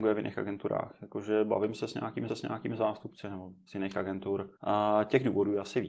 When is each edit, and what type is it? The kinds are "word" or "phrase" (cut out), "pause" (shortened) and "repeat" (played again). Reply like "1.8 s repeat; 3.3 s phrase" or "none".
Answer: 2.3 s repeat; 3.7 s phrase; 4.6 s pause